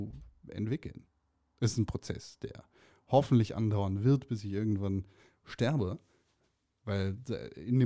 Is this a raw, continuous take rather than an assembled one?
yes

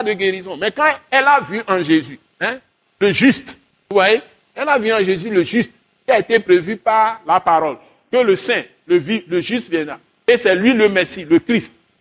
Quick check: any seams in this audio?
no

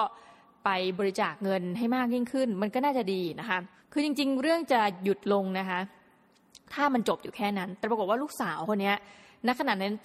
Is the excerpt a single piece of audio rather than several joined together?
no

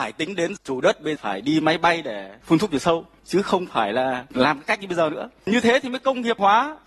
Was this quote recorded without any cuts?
no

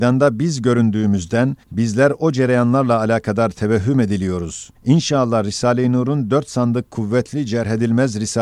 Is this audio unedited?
no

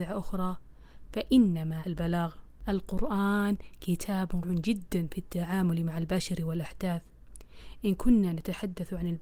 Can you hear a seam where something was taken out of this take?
yes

